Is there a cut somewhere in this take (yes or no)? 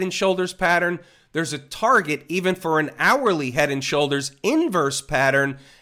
no